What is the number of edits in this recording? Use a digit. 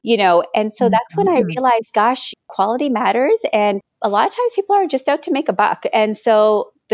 0